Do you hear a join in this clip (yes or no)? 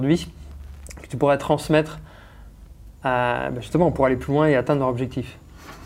no